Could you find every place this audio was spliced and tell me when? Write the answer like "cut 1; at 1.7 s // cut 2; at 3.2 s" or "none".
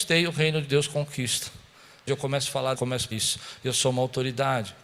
cut 1; at 2.1 s // cut 2; at 2.8 s // cut 3; at 3.1 s